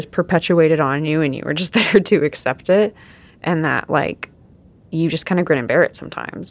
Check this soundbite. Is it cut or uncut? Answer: uncut